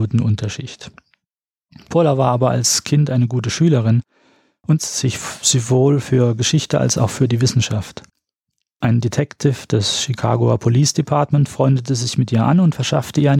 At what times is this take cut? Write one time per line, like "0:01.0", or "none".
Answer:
0:04.8